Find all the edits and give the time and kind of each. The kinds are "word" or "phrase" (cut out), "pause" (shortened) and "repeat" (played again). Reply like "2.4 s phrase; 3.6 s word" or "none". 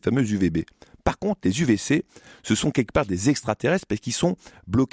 none